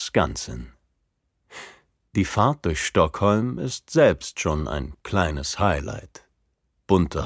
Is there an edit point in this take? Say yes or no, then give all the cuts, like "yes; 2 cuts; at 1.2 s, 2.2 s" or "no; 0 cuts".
no; 0 cuts